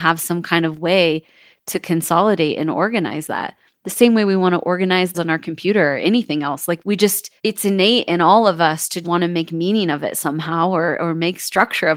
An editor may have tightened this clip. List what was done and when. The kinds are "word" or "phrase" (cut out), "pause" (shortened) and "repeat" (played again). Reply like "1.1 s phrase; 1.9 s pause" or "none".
5.1 s word; 6.8 s word; 7.4 s pause; 9.0 s word